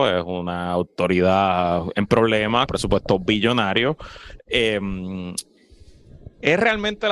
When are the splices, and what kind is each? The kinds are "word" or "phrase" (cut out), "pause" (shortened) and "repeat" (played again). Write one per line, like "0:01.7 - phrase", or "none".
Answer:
0:02.7 - word